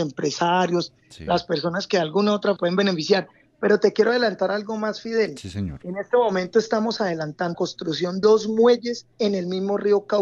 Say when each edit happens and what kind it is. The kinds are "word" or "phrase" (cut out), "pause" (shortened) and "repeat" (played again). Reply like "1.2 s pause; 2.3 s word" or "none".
2.6 s phrase; 7.5 s word; 8.2 s word; 9.1 s pause